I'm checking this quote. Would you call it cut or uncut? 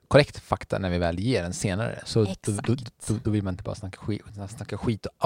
uncut